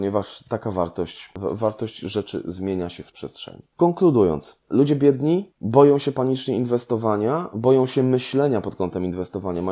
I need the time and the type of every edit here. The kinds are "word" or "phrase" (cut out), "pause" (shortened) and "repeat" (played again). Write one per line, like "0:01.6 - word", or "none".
0:03.1 - phrase
0:05.5 - pause